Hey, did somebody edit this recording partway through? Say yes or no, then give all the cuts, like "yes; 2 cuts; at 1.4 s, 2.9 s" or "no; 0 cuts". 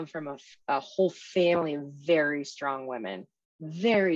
no; 0 cuts